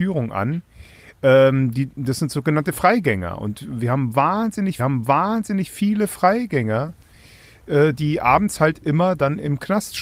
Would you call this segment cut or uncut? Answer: cut